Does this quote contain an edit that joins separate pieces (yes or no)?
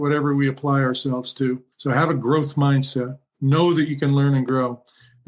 yes